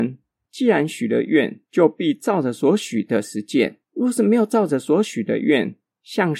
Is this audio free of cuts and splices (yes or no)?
no